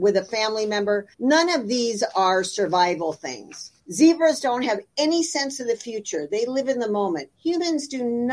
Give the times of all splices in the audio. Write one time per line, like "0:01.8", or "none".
0:01.1
0:03.8
0:07.3